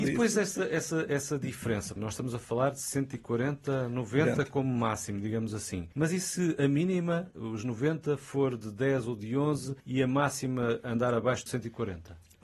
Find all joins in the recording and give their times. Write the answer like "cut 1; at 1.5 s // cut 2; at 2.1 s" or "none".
cut 1; at 2.0 s // cut 2; at 5.9 s // cut 3; at 9.8 s // cut 4; at 11.5 s